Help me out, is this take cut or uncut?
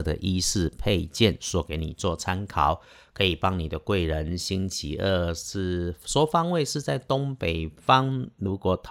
uncut